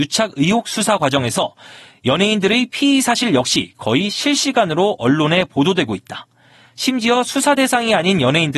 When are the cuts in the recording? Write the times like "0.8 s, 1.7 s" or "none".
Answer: none